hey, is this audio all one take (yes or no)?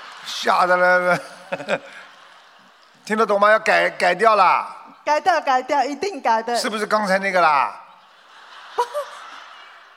yes